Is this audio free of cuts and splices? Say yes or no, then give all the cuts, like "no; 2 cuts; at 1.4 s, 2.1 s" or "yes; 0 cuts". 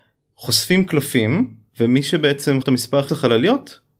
no; 3 cuts; at 1.7 s, 2.6 s, 3.1 s